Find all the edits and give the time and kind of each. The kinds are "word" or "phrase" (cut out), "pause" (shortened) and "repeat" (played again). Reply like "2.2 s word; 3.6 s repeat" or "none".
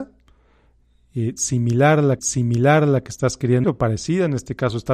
2.2 s repeat; 3.6 s word